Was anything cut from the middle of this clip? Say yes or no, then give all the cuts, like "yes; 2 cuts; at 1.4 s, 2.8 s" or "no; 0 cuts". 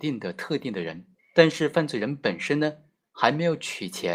yes; 1 cut; at 1.2 s